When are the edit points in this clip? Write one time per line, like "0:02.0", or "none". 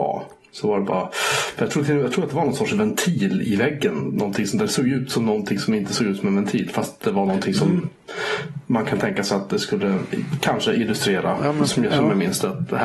none

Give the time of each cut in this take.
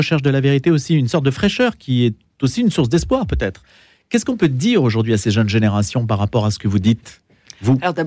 none

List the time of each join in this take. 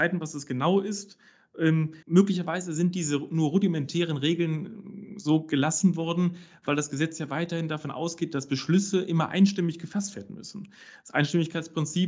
0:02.0

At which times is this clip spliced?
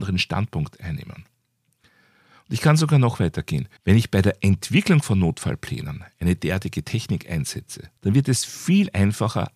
0:03.8
0:08.0

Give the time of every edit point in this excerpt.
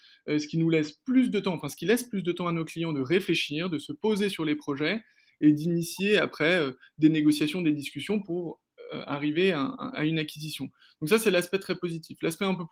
none

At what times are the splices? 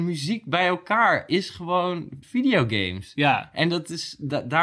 0:02.2

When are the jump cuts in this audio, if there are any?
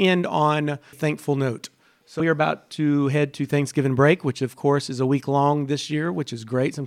0:00.9
0:02.2

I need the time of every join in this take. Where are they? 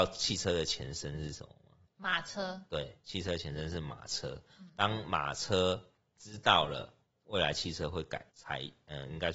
0:01.9
0:08.3

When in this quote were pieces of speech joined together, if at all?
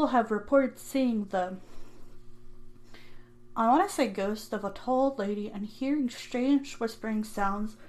none

